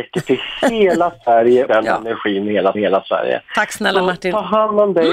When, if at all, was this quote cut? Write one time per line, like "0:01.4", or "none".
0:01.7
0:02.7